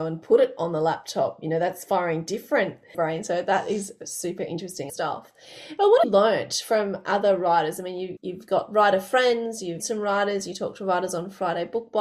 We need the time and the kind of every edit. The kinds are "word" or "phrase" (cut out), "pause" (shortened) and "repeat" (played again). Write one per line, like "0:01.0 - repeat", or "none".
0:02.9 - phrase
0:04.9 - phrase
0:06.0 - word
0:08.2 - word
0:09.8 - word